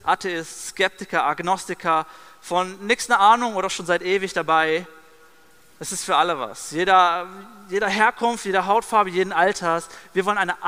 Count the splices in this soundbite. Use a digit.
0